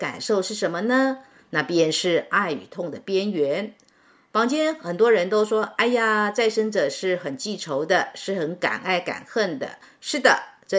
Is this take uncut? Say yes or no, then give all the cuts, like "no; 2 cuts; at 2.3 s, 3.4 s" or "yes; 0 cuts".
yes; 0 cuts